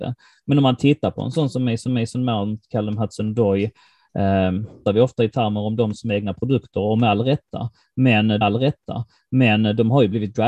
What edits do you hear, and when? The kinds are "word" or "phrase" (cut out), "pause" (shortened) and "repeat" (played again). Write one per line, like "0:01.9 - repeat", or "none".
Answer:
0:01.9 - repeat
0:04.9 - phrase
0:08.4 - repeat